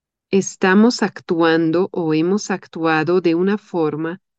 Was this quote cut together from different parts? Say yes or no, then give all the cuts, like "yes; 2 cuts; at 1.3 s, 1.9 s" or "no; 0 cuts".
no; 0 cuts